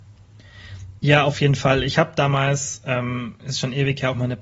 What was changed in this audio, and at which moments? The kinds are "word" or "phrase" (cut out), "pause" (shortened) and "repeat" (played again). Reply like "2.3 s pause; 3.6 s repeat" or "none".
none